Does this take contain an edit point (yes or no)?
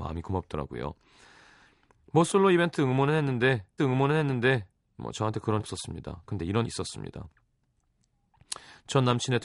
yes